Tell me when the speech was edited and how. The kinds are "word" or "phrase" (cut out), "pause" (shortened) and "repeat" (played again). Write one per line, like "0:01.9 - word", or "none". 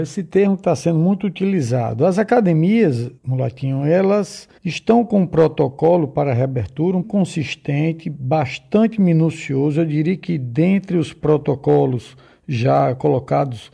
0:03.2 - pause
0:04.6 - pause
0:07.0 - phrase